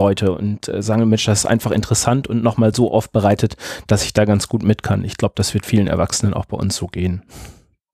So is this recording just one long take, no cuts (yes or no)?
yes